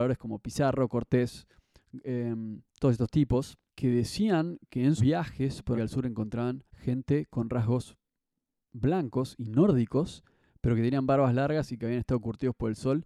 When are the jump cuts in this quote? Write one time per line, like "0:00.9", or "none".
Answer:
0:02.7
0:03.7
0:04.7
0:05.0
0:05.8
0:06.7